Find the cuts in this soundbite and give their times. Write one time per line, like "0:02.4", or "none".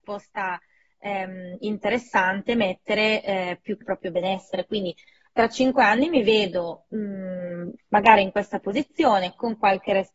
0:03.8